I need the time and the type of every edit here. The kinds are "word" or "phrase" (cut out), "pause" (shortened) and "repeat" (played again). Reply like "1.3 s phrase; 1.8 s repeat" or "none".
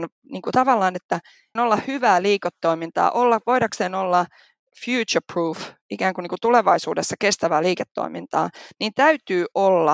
1.6 s word